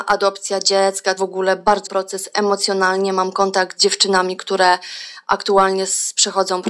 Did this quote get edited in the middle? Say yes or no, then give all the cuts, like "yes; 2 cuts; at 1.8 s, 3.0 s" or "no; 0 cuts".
yes; 3 cuts; at 1.2 s, 1.9 s, 3.8 s